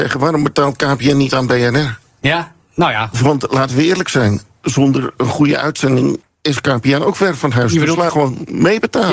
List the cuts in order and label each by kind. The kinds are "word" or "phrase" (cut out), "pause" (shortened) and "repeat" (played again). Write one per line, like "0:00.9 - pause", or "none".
0:06.2 - pause
0:08.1 - phrase